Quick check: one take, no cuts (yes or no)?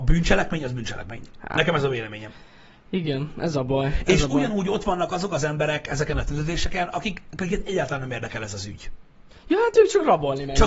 yes